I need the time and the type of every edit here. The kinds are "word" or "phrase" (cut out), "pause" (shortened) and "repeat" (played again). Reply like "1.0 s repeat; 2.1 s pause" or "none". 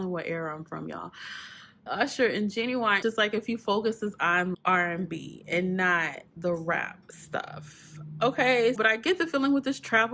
1.9 s word; 3.0 s word; 4.5 s word; 6.3 s pause; 7.0 s pause; 8.8 s word